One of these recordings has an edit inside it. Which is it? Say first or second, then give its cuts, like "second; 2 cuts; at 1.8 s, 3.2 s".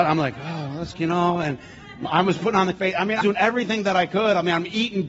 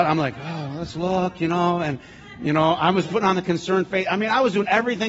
first; 4 cuts; at 0.9 s, 2.1 s, 2.8 s, 3.2 s